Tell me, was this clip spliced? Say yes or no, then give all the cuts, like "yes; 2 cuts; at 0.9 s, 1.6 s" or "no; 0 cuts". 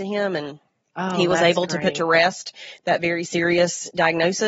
no; 0 cuts